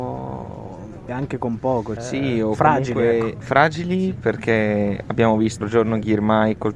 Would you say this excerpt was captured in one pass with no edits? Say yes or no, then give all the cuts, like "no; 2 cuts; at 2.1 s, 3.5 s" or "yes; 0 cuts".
no; 3 cuts; at 1.1 s, 2.0 s, 5.6 s